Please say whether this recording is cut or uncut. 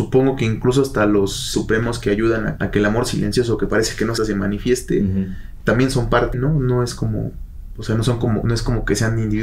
cut